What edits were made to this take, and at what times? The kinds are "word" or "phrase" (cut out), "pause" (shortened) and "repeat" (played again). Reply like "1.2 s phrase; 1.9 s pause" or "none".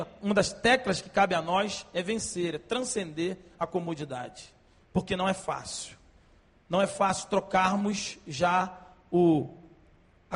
none